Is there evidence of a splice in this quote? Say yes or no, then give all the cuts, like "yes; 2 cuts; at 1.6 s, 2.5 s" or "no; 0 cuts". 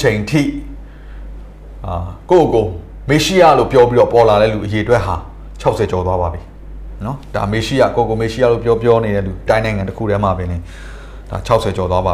yes; 1 cut; at 9.5 s